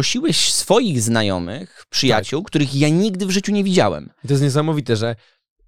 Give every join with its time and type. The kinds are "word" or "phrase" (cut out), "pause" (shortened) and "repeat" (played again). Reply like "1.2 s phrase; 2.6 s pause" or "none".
none